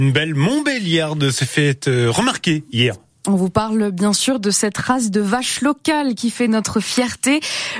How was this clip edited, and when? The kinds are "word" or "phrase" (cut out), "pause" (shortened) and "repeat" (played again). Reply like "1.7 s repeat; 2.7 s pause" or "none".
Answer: none